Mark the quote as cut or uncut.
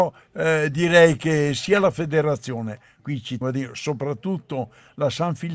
cut